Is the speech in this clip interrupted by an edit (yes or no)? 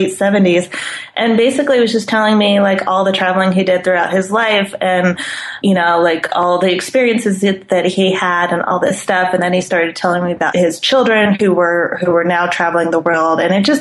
yes